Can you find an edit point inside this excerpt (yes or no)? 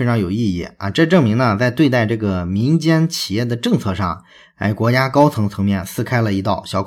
no